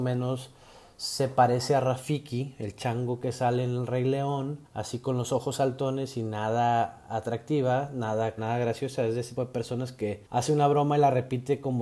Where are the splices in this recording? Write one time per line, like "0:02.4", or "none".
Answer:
0:04.6
0:08.4
0:09.4
0:10.3